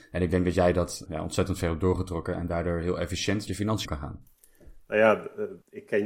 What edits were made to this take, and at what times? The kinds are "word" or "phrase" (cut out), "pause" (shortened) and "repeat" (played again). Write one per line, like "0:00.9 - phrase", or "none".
0:01.1 - word
0:03.5 - word
0:03.8 - word